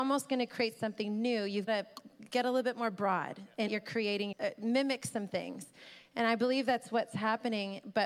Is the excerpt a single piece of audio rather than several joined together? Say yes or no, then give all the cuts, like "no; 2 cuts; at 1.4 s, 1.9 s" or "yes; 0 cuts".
no; 3 cuts; at 1.7 s, 3.7 s, 4.3 s